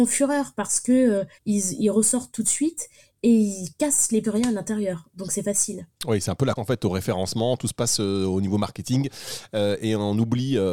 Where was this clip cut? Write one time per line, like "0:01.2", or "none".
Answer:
0:01.4
0:04.2
0:05.9
0:06.6